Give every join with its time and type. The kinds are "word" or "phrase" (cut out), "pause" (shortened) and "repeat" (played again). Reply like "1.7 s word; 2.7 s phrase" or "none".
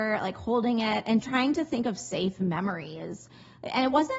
1.2 s word